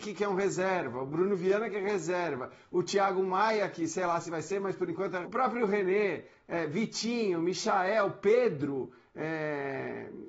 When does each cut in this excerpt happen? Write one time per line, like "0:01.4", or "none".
0:05.2